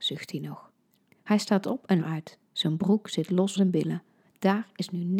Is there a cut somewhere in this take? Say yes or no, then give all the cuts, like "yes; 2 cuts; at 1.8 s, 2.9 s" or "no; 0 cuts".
yes; 3 cuts; at 2.0 s, 2.5 s, 3.6 s